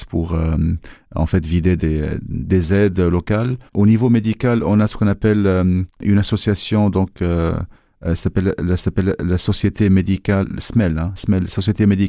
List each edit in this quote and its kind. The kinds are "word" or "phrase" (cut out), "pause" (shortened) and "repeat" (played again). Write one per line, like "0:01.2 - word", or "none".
0:03.7 - pause
0:05.9 - pause
0:08.8 - repeat